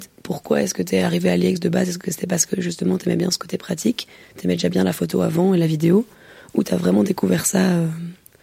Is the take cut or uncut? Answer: uncut